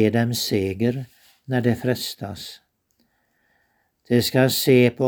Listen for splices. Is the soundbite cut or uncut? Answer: uncut